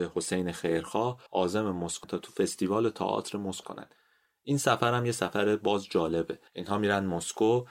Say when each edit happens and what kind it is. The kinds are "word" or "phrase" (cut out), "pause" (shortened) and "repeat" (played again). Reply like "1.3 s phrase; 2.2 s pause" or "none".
1.3 s pause; 2.0 s word; 3.6 s word; 6.5 s pause